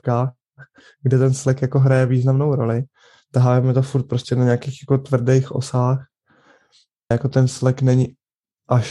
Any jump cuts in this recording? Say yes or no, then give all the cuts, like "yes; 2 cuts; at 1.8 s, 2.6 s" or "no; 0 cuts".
yes; 1 cut; at 7.1 s